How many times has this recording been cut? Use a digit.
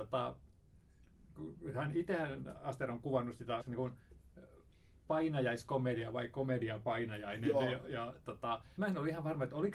2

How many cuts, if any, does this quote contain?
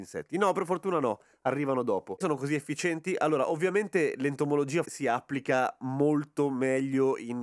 2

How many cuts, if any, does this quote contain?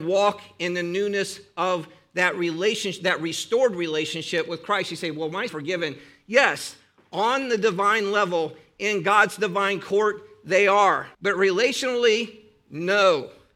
2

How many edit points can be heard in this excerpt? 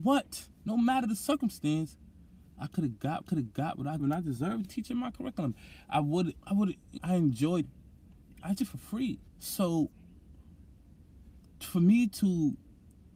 8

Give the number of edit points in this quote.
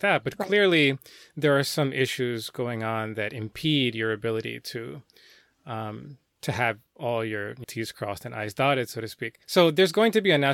2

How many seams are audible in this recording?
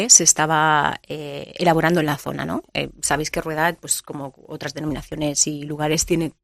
0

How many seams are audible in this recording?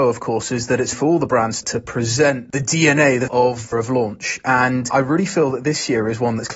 4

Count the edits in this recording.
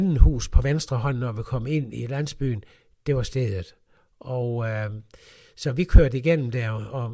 0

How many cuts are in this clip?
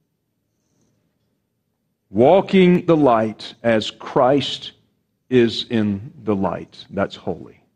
1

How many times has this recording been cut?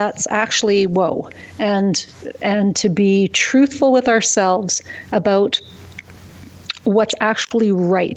0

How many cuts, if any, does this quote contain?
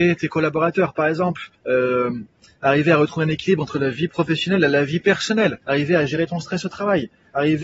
2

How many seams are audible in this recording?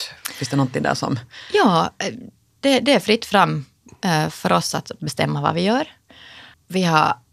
0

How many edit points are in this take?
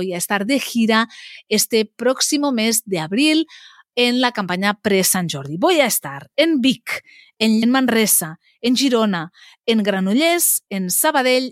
1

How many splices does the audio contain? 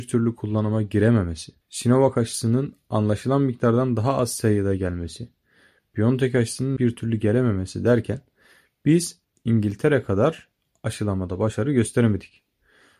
3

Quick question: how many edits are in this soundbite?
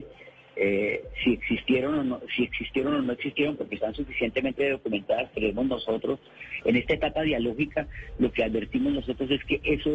0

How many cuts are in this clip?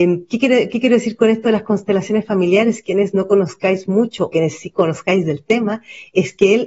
1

